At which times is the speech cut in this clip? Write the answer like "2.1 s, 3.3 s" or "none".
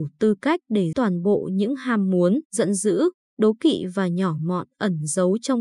0.9 s, 2.5 s